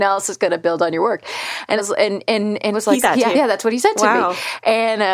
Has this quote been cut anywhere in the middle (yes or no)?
yes